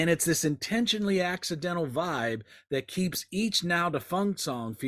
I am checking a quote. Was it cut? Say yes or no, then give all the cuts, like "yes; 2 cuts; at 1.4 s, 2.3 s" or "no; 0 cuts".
no; 0 cuts